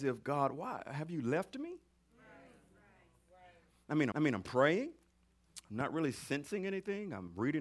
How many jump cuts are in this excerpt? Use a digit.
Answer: 1